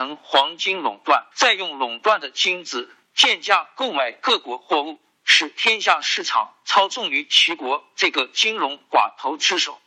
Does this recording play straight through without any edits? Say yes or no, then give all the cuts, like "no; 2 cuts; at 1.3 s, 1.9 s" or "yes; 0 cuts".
no; 1 cut; at 1.3 s